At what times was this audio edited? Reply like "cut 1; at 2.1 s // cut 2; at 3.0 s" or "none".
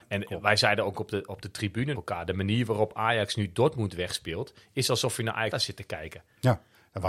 cut 1; at 1.9 s // cut 2; at 5.5 s